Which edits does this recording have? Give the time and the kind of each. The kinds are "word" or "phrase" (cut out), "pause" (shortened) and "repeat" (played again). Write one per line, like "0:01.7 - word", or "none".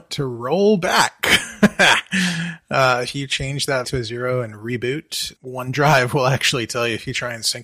0:03.8 - word
0:05.4 - word